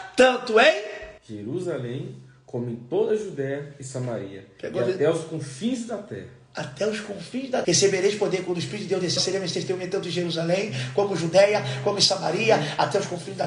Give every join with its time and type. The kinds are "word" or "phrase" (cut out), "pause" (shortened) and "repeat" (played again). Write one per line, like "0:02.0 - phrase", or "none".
0:01.2 - pause
0:07.6 - word
0:09.2 - phrase